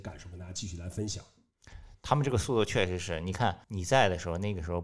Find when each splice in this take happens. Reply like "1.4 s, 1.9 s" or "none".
3.6 s